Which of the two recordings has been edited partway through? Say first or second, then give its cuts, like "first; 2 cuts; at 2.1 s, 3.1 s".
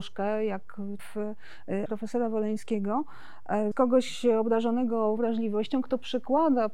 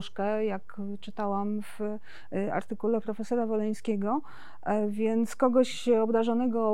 first; 4 cuts; at 1.0 s, 1.9 s, 3.7 s, 5.2 s